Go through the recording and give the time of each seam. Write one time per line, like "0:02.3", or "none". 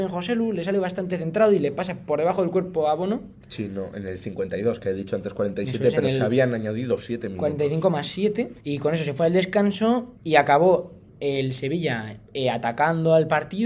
0:08.6
0:10.2
0:12.3